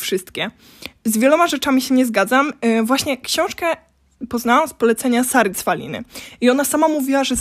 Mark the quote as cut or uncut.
uncut